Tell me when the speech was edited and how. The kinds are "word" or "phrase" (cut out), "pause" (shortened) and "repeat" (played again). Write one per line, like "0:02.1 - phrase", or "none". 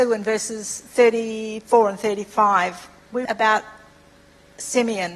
0:03.3 - word